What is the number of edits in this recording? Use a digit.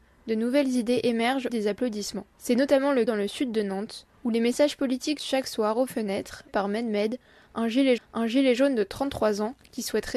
7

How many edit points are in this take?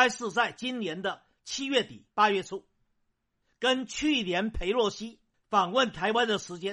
1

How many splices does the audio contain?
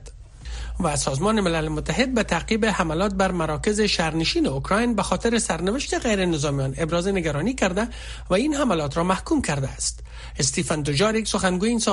0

